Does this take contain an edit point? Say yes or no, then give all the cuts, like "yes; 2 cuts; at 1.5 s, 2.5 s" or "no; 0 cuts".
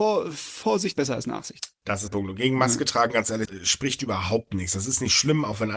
yes; 3 cuts; at 0.9 s, 2.1 s, 3.4 s